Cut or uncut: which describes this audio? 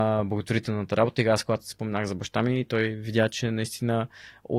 uncut